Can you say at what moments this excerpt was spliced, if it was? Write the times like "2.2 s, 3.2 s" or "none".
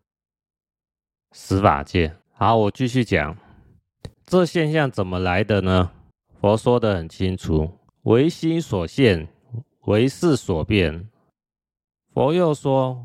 2.2 s, 4.1 s, 6.1 s, 7.9 s